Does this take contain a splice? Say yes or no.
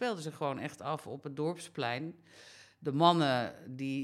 no